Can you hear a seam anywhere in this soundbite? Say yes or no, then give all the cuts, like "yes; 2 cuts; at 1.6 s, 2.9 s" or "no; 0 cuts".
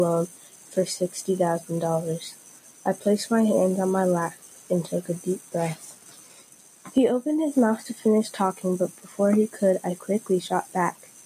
no; 0 cuts